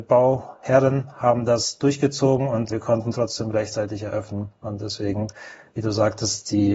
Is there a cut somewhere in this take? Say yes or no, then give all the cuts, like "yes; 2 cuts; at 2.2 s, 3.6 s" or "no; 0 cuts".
yes; 1 cut; at 2.7 s